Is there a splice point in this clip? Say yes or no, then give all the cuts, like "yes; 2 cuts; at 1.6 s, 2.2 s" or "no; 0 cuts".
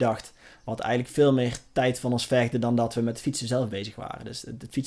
no; 0 cuts